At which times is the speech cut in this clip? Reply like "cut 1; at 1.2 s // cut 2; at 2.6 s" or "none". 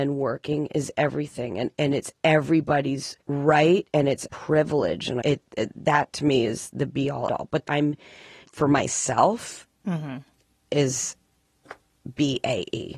cut 1; at 3.2 s // cut 2; at 4.3 s // cut 3; at 5.2 s // cut 4; at 7.3 s // cut 5; at 7.7 s // cut 6; at 8.4 s